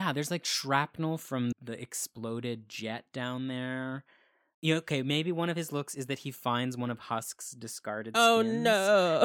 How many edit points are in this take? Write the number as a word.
one